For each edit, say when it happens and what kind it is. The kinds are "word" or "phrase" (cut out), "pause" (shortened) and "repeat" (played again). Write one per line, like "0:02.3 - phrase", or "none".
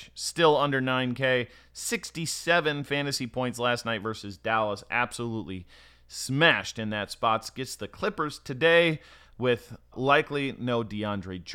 0:09.9 - word